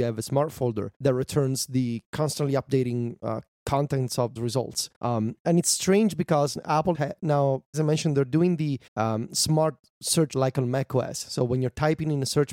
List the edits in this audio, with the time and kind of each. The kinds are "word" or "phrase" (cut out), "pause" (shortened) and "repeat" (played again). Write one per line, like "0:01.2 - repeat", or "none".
0:01.0 - pause
0:04.4 - word
0:04.9 - pause
0:06.9 - word
0:07.7 - word
0:08.9 - pause
0:10.3 - word